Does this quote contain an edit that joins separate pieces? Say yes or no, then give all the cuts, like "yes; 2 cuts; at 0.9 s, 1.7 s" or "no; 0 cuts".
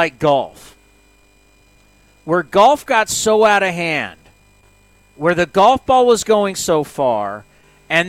no; 0 cuts